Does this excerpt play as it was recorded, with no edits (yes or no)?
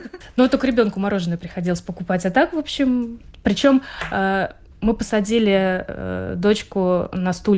yes